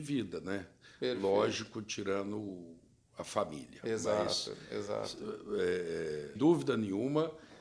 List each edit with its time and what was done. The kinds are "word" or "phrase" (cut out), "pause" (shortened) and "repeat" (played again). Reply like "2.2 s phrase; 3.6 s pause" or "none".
6.4 s word